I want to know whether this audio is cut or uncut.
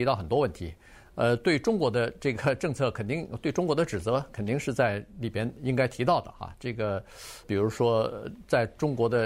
cut